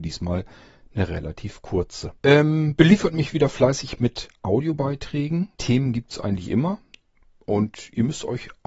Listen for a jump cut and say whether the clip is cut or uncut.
cut